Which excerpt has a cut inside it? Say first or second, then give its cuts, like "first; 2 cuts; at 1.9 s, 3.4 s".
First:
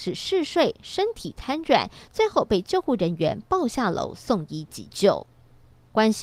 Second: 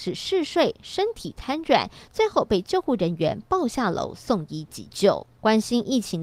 second; 1 cut; at 5.3 s